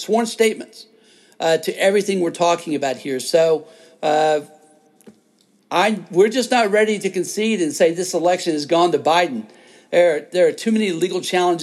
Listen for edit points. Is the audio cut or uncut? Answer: uncut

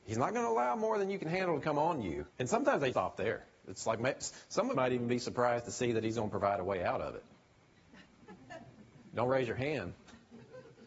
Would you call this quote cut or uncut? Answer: cut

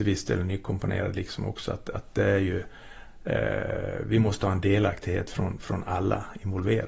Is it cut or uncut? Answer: uncut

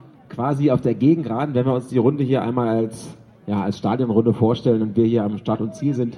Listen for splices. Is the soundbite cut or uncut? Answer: uncut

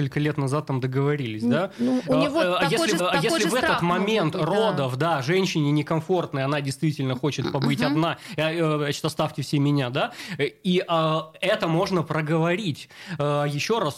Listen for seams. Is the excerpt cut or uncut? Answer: cut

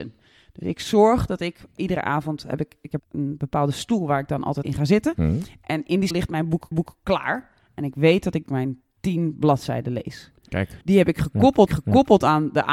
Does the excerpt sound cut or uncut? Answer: cut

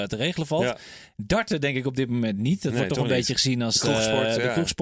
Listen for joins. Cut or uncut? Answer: uncut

